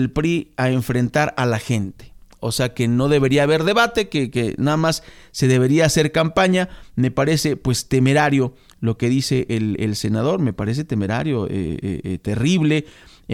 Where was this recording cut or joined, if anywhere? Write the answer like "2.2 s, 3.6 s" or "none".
none